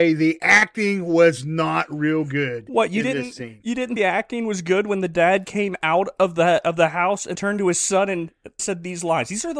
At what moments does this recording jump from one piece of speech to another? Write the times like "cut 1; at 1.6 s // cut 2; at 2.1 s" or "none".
cut 1; at 4.0 s // cut 2; at 7.4 s // cut 3; at 8.6 s